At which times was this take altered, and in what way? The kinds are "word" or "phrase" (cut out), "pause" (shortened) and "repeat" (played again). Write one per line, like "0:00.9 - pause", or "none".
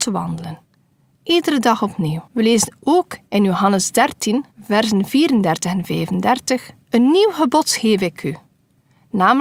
0:02.3 - pause
0:04.5 - pause
0:06.8 - pause